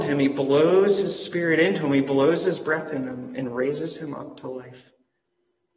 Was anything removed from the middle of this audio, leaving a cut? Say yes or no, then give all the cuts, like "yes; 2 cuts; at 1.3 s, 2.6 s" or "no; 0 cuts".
no; 0 cuts